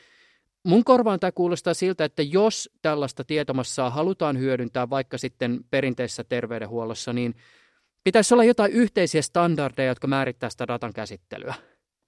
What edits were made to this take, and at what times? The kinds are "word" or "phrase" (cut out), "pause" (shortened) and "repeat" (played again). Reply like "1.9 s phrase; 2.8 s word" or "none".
none